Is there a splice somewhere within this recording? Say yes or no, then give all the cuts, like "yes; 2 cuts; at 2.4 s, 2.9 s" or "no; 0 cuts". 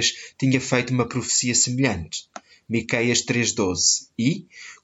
no; 0 cuts